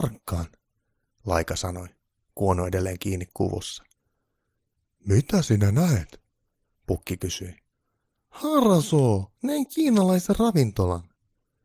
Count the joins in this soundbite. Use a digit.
1